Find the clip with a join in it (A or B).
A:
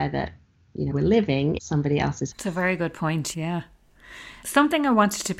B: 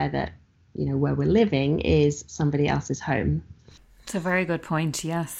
A